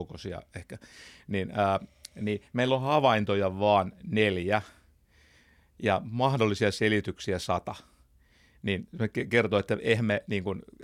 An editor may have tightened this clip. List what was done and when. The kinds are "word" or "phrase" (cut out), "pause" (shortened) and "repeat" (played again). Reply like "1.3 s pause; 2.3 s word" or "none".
none